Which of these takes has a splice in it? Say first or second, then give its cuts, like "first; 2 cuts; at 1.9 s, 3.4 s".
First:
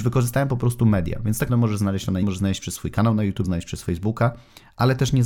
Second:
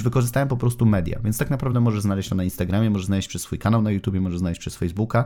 first; 3 cuts; at 1.5 s, 2.2 s, 3.4 s